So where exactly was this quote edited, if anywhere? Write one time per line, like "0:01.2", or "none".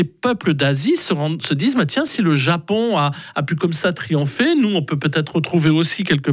none